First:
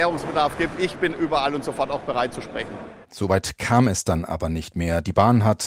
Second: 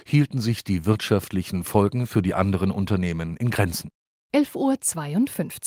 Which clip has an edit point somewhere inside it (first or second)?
first